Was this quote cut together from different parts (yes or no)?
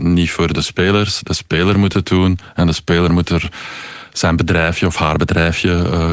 no